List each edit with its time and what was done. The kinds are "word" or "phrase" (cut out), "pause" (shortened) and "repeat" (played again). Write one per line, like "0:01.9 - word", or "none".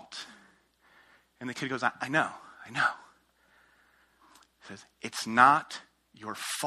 none